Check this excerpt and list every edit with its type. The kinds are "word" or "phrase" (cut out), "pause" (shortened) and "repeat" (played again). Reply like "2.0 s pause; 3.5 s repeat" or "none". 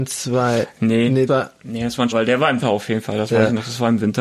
1.3 s word; 2.1 s word; 2.6 s word